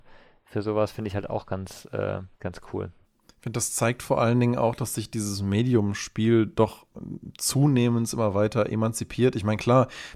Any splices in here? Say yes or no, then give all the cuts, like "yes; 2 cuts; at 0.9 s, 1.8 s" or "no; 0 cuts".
yes; 2 cuts; at 2.3 s, 3.0 s